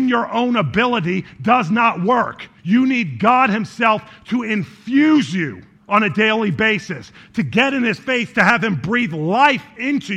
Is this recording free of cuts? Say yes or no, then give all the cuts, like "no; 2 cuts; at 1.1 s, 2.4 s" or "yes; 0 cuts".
no; 2 cuts; at 2.6 s, 5.8 s